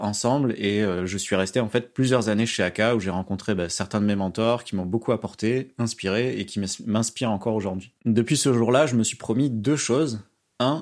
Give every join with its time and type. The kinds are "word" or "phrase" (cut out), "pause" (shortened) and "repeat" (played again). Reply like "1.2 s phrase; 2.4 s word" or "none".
8.0 s pause